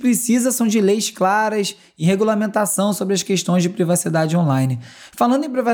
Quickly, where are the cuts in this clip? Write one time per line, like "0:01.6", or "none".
none